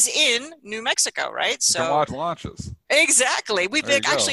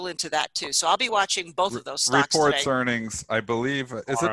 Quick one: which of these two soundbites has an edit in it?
first; 1 cut; at 2.1 s

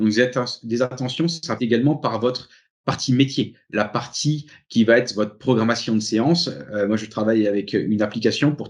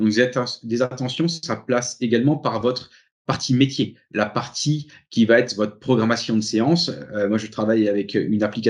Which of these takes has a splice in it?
first; 1 cut; at 1.6 s

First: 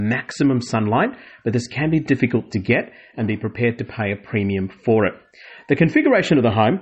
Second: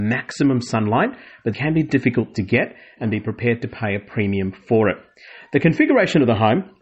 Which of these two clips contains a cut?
second; 1 cut; at 1.5 s

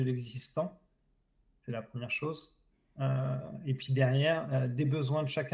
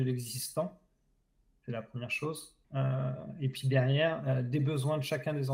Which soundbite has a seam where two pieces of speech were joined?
second; 1 cut; at 2.6 s

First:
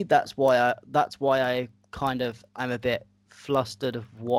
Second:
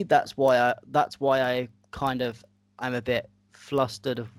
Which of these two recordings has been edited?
first; 1 cut; at 2.5 s

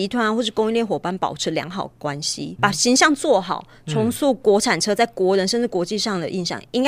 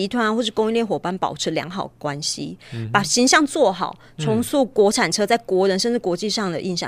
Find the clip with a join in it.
first; 1 cut; at 2.6 s

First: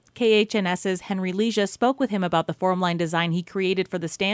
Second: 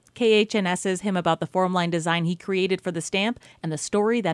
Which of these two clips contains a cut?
second; 1 cut; at 1.0 s

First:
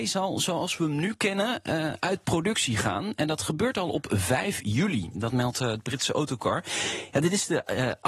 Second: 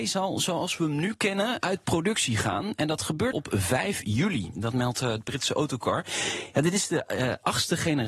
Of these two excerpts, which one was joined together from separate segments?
second; 2 cuts; at 1.6 s, 3.3 s

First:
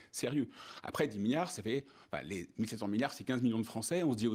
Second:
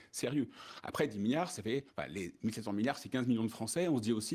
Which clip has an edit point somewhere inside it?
second; 1 cut; at 1.9 s

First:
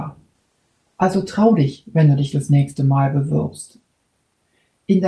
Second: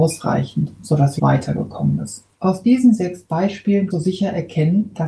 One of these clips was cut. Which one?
second; 3 cuts; at 1.2 s, 2.3 s, 3.9 s

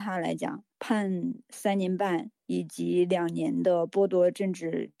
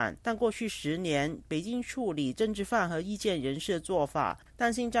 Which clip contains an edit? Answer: first; 1 cut; at 2.4 s

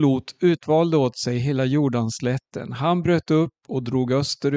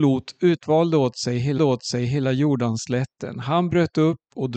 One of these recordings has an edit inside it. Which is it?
second; 1 cut; at 1.6 s

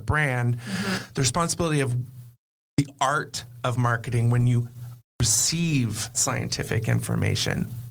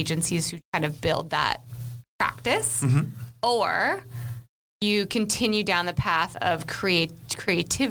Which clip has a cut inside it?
first; 1 cut; at 6.1 s

